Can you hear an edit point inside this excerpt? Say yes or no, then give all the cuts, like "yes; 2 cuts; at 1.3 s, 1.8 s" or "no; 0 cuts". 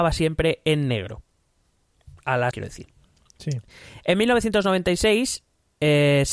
yes; 1 cut; at 2.5 s